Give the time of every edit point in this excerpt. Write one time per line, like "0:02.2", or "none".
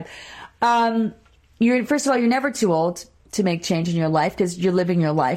none